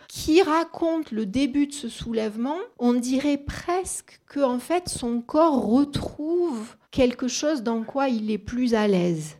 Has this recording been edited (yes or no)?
yes